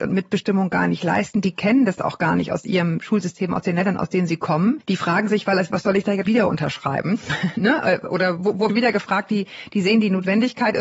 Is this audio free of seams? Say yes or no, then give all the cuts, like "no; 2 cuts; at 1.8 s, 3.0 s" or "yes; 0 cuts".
no; 3 cuts; at 6.3 s, 8.4 s, 8.7 s